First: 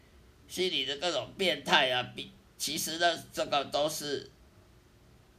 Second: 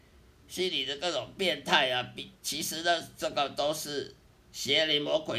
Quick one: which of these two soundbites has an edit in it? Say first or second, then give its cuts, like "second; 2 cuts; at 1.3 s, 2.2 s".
second; 2 cuts; at 2.4 s, 4.3 s